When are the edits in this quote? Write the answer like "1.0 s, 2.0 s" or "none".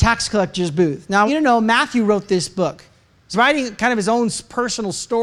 1.3 s, 3.3 s